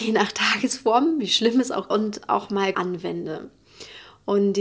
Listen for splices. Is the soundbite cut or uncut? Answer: cut